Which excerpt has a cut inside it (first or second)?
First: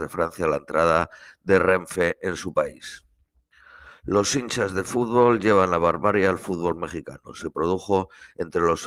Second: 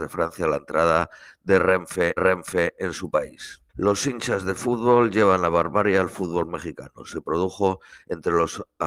second